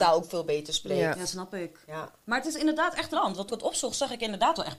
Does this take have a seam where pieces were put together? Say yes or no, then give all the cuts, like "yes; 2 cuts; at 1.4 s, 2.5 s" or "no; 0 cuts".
yes; 2 cuts; at 3.1 s, 3.5 s